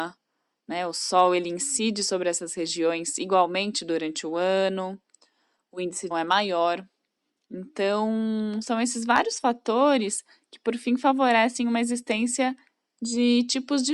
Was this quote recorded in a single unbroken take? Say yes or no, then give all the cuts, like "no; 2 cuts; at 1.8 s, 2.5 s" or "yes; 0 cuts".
no; 1 cut; at 6.1 s